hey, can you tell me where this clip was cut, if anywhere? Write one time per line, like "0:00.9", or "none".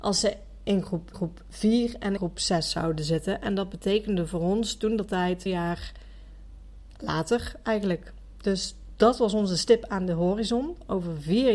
0:01.1
0:02.2
0:05.5